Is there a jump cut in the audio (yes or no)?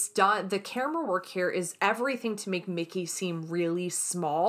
no